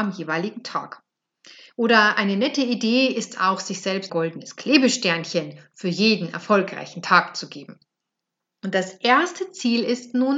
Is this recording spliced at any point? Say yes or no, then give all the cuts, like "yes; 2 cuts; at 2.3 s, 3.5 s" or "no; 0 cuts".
yes; 1 cut; at 4.1 s